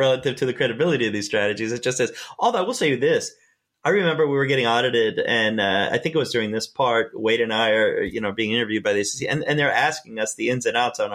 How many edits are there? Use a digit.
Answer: 0